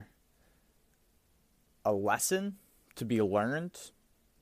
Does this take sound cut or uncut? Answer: uncut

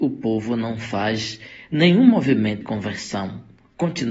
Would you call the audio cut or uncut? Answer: cut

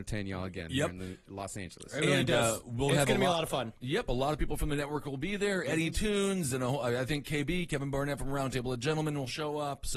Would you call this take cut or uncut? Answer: uncut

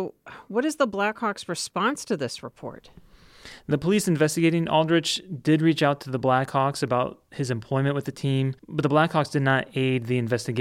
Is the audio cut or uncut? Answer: cut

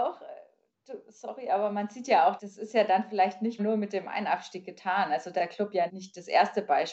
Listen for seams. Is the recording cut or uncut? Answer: cut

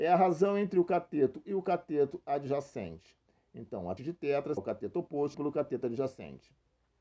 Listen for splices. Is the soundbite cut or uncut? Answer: cut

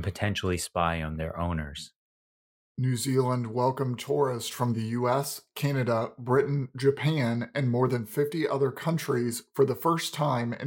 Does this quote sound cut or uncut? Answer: uncut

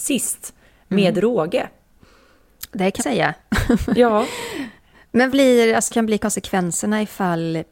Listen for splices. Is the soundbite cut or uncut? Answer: cut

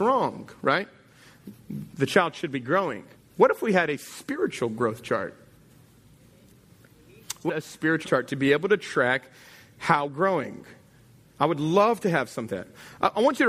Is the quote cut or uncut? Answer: cut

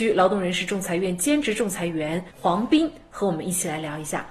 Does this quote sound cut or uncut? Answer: cut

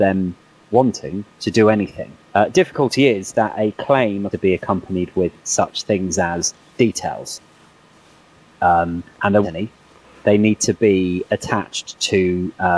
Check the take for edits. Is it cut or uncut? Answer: cut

